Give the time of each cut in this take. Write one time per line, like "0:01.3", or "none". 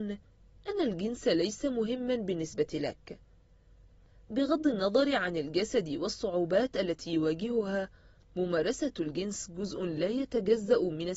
none